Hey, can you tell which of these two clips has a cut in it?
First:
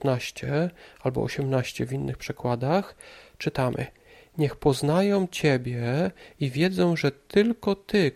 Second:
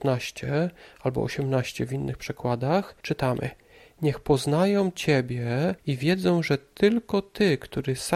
second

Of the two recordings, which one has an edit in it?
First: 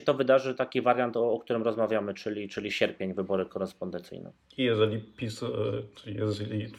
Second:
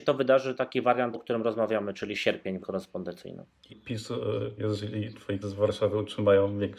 second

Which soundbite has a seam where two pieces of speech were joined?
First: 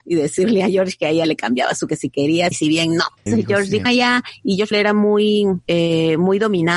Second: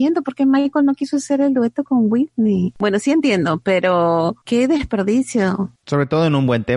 first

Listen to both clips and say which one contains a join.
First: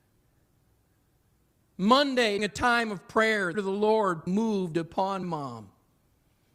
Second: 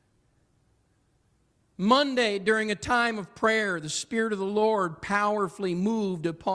first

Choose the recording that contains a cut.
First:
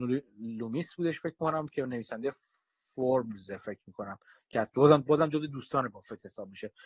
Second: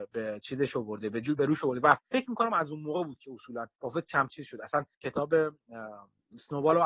second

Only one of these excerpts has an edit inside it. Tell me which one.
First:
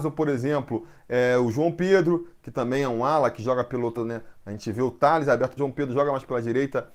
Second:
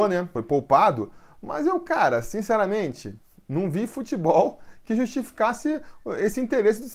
first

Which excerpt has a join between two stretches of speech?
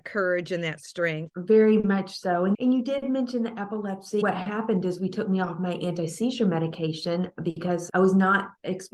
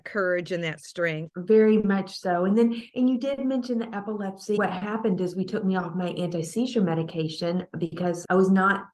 first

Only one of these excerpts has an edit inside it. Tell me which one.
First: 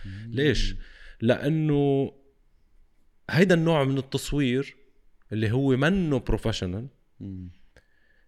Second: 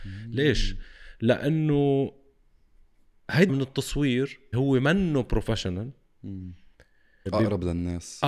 second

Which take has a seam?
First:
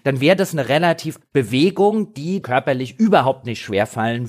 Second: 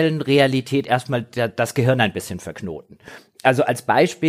first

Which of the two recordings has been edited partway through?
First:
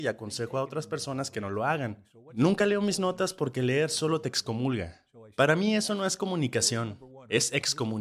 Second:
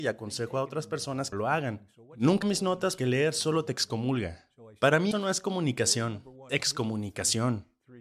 second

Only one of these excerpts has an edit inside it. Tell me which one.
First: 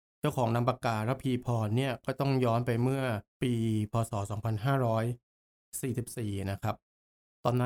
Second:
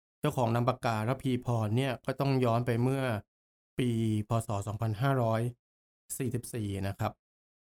first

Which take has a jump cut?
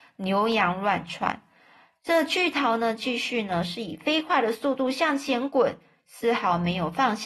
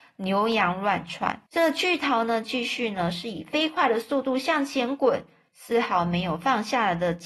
second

